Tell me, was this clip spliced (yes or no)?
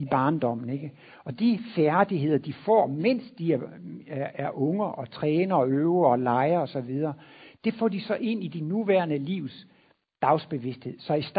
no